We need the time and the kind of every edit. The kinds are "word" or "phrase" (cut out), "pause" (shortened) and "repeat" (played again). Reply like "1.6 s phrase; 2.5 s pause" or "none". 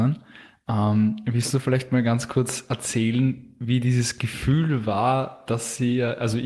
none